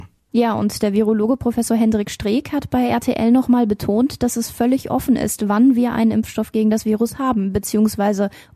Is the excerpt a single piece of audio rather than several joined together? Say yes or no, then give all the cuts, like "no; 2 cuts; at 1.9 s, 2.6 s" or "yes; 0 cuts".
yes; 0 cuts